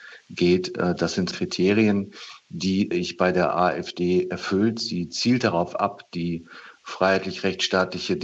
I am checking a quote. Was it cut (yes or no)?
yes